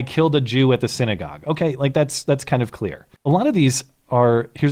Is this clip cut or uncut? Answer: cut